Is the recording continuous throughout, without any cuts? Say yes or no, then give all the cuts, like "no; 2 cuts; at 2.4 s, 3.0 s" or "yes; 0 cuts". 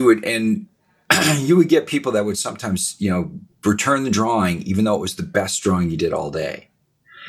yes; 0 cuts